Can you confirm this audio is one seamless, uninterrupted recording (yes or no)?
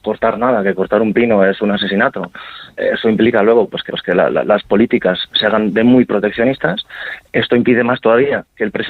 no